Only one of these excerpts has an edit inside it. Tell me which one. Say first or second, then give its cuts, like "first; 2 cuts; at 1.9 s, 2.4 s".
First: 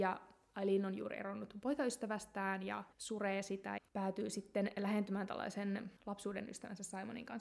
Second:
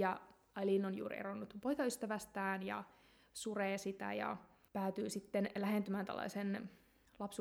first; 3 cuts; at 2.9 s, 3.8 s, 6.0 s